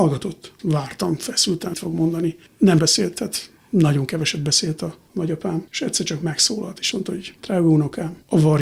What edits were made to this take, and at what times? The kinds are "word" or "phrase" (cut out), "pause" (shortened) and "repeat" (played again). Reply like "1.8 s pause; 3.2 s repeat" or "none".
1.7 s word; 2.8 s word; 3.6 s pause; 6.9 s word

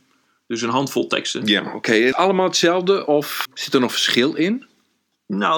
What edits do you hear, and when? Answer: 2.1 s phrase; 3.4 s word

